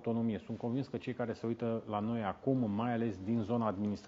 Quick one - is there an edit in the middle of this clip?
no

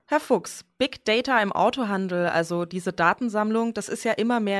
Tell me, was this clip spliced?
no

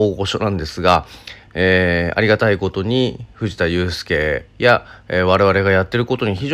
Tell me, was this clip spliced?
no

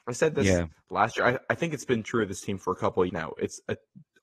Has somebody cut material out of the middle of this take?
yes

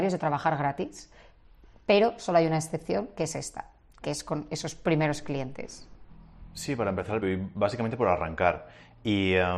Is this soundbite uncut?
no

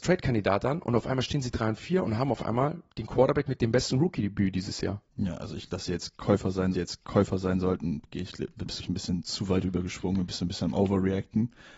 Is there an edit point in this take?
yes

